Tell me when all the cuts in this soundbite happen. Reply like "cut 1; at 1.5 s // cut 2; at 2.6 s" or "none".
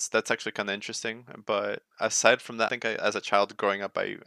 cut 1; at 1.9 s // cut 2; at 2.7 s